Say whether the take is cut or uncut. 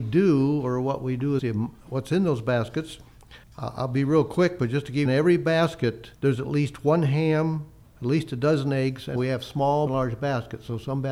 cut